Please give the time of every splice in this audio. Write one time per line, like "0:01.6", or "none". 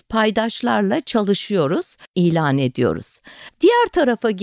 0:02.1